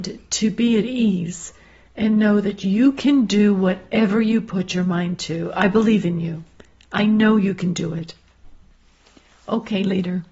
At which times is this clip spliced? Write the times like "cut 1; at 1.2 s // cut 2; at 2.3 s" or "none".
none